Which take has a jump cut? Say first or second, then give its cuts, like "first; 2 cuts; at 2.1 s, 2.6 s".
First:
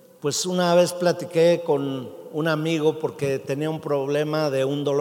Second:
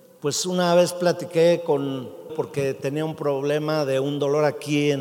second; 1 cut; at 2.3 s